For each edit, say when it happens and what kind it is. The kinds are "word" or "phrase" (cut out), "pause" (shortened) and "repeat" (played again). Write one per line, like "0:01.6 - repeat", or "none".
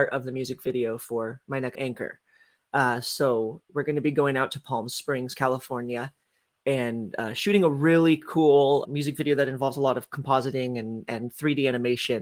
0:01.7 - word
0:08.8 - word

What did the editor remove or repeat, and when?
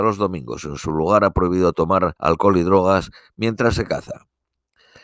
0:02.2 - pause

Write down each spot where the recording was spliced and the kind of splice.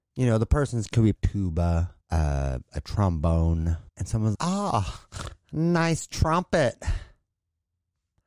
0:01.2 - phrase
0:02.0 - pause
0:03.9 - pause
0:04.3 - word

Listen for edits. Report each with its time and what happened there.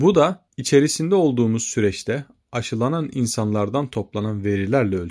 none

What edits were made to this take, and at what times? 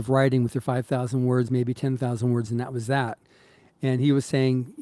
none

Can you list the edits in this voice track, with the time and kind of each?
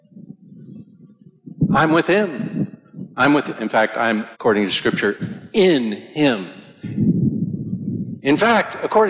0:04.3 - pause

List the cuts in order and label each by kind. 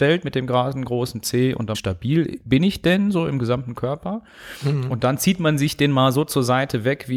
0:01.7 - phrase

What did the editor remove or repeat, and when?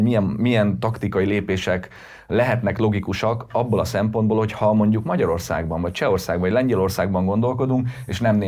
none

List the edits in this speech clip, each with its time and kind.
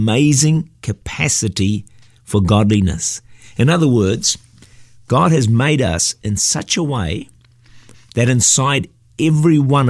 none

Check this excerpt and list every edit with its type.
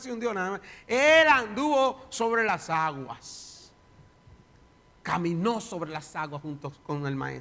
none

